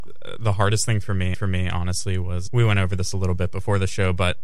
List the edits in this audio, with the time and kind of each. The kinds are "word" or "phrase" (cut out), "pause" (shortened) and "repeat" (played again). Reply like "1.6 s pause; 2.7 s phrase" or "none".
1.3 s repeat; 2.5 s word